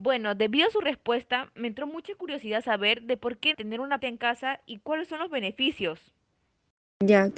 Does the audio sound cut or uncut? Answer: cut